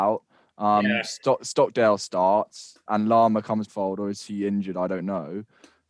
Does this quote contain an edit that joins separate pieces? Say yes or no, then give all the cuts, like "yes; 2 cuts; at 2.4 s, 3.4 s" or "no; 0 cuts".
yes; 2 cuts; at 2.9 s, 3.7 s